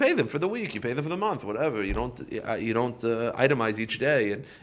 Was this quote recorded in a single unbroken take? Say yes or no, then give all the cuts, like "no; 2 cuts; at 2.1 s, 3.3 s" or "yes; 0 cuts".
yes; 0 cuts